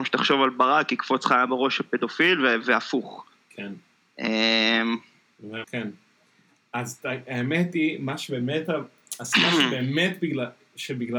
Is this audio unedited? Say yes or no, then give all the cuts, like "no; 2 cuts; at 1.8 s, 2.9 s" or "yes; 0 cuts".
no; 1 cut; at 5.6 s